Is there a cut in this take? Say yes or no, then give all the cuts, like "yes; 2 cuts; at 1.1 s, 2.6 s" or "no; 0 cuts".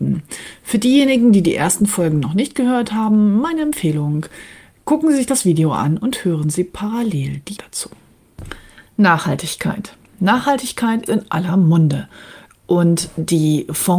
yes; 2 cuts; at 7.6 s, 11.1 s